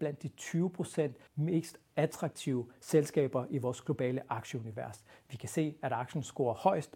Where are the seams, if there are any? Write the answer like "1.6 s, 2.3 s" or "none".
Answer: 1.3 s